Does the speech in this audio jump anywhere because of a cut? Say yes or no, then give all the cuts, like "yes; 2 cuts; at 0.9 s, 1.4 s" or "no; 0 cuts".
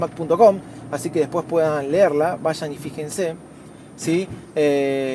no; 0 cuts